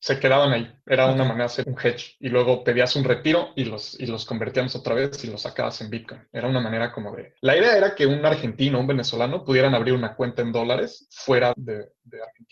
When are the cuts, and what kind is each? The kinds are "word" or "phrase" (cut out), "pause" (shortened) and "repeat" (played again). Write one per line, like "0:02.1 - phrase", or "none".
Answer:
0:01.6 - word
0:07.4 - pause
0:11.5 - word

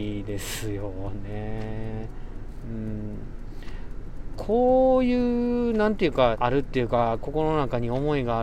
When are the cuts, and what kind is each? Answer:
0:06.3 - phrase

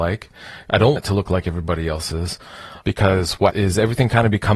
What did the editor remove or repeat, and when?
0:01.0 - word
0:02.8 - word
0:03.5 - word

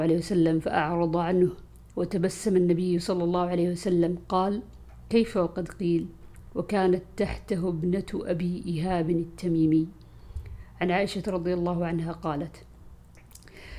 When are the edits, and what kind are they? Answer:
none

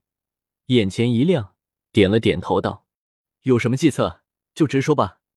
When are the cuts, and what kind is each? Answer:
none

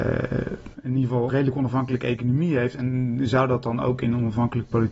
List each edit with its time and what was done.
0:01.3 - word

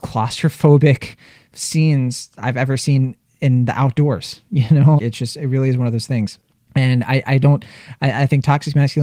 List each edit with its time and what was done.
0:05.0 - word

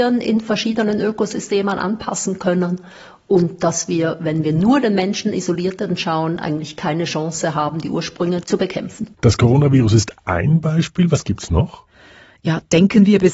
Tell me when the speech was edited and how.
0:09.1 - pause

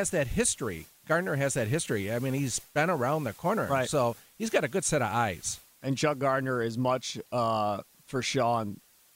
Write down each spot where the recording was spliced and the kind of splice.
none

